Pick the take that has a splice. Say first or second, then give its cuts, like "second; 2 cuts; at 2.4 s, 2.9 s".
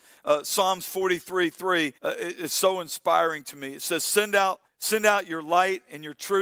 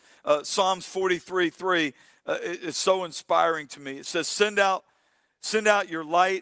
first; 2 cuts; at 2.0 s, 4.7 s